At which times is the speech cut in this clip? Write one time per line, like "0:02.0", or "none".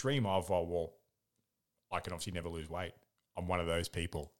none

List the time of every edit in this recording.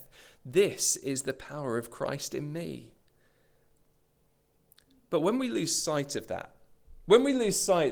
none

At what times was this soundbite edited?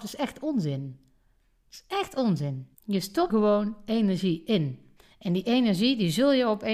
0:02.7
0:03.3
0:05.0

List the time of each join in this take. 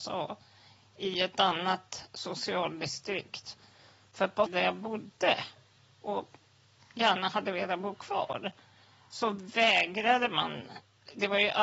0:04.5

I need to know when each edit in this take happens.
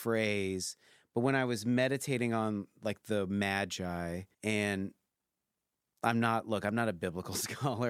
0:04.3

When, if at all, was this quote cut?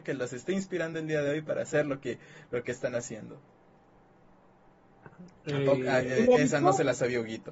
none

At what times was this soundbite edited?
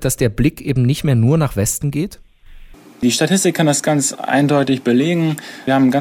none

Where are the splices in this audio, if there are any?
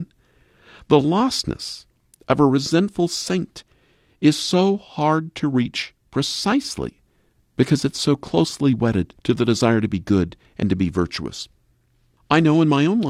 0:09.2

